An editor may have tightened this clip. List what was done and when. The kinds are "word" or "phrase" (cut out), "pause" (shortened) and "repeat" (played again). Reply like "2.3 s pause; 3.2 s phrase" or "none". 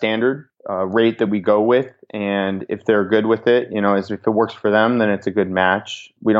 none